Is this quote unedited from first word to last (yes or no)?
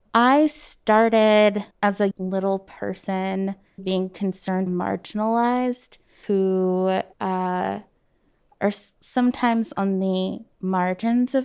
no